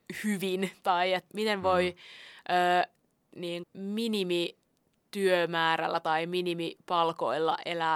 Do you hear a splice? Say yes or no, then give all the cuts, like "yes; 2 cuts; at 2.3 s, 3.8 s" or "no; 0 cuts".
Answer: yes; 2 cuts; at 1.3 s, 3.6 s